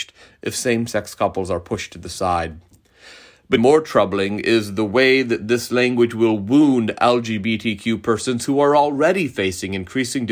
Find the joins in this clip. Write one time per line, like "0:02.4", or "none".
0:03.6